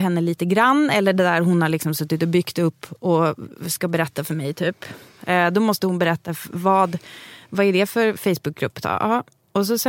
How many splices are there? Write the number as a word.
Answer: one